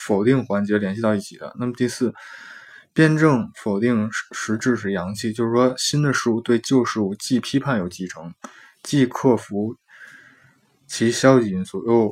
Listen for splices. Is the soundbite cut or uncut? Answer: uncut